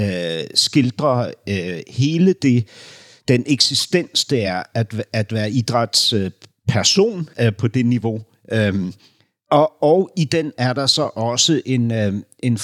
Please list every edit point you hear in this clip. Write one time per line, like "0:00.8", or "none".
none